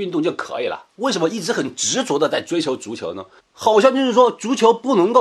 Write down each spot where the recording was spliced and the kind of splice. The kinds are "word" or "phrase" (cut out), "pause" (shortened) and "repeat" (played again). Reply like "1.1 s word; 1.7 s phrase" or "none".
3.4 s pause